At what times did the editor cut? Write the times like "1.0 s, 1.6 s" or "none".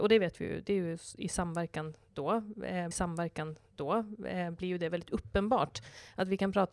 2.9 s